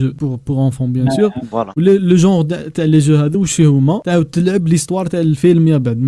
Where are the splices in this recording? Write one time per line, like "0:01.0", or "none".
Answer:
none